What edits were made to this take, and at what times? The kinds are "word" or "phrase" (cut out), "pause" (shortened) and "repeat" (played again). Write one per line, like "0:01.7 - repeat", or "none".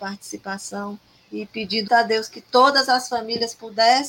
0:01.9 - word